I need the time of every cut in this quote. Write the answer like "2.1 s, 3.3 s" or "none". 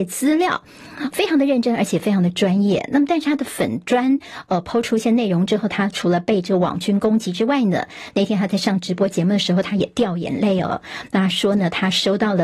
1.1 s